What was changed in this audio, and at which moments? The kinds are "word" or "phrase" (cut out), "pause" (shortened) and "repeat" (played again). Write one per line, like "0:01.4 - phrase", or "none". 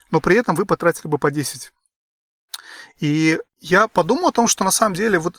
none